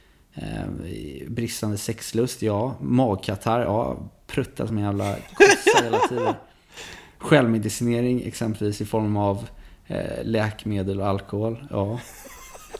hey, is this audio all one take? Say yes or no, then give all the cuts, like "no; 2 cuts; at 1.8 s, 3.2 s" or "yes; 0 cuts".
yes; 0 cuts